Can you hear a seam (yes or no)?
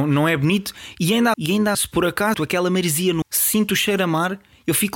yes